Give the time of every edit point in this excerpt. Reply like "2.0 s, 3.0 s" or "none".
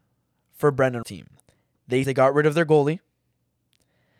1.0 s, 2.0 s

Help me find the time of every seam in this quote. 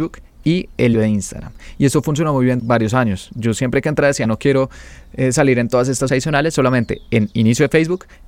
0.9 s, 2.6 s, 4.2 s, 6.1 s

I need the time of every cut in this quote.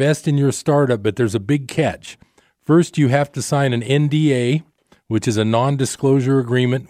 none

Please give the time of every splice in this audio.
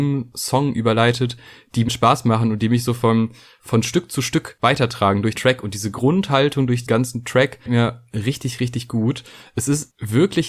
1.9 s, 5.4 s, 6.9 s, 7.7 s

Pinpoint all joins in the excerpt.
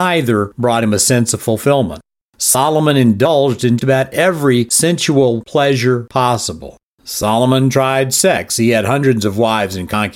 3.8 s

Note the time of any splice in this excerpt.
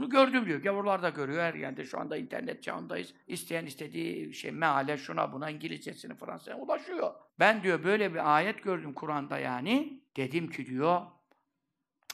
1.5 s, 3.2 s, 7.3 s, 10.1 s

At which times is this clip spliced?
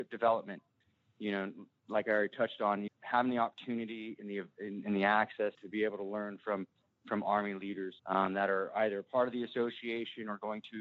2.9 s, 5.5 s, 8.0 s

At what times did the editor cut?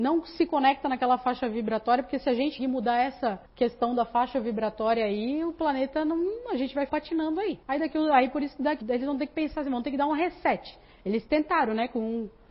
2.6 s, 3.4 s, 6.9 s, 7.6 s, 8.8 s

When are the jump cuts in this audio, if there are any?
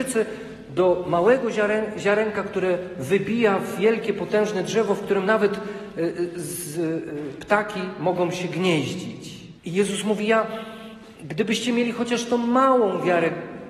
9.6 s, 11.1 s

